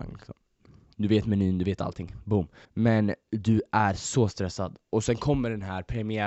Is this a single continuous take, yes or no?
no